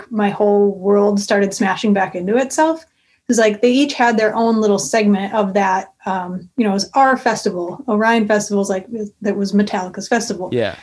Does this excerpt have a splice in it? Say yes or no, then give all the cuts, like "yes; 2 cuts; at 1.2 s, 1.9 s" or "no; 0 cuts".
no; 0 cuts